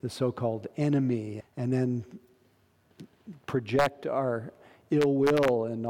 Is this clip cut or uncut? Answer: cut